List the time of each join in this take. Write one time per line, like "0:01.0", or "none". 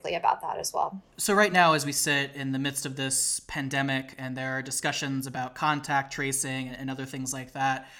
none